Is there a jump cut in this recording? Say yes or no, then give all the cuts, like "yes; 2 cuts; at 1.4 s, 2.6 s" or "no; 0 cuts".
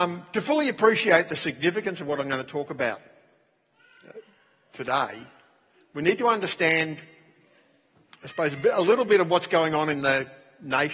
no; 0 cuts